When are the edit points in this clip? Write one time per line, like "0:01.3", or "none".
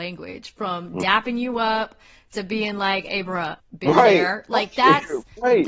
0:03.6